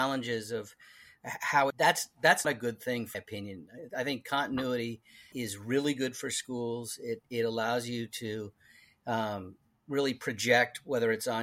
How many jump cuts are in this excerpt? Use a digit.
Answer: 4